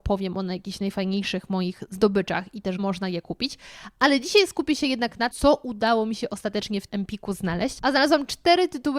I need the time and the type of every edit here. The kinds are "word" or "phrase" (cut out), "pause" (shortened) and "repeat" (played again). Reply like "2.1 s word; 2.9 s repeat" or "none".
2.8 s word; 5.3 s word; 6.9 s word